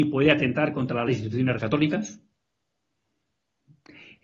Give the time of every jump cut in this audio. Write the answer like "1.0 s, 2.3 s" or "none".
1.1 s, 1.6 s